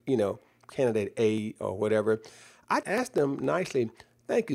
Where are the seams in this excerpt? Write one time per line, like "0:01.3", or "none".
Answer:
0:02.8